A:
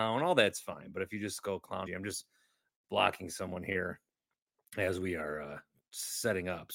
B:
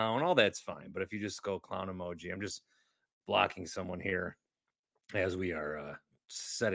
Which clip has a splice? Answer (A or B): A